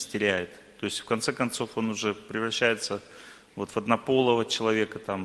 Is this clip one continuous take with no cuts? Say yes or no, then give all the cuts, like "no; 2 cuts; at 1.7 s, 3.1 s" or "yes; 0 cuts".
yes; 0 cuts